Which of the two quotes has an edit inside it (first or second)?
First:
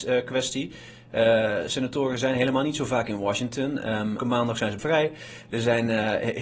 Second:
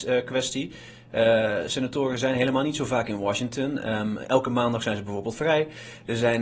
first